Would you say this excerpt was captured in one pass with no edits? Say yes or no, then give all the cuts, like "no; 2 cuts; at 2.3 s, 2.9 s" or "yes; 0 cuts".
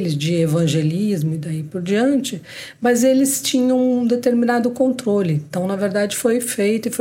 yes; 0 cuts